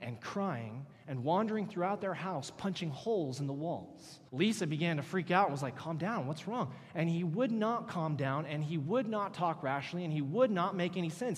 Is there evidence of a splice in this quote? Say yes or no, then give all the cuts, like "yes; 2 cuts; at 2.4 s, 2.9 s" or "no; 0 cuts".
yes; 1 cut; at 4.3 s